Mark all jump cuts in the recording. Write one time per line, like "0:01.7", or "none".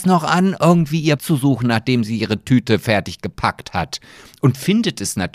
0:01.2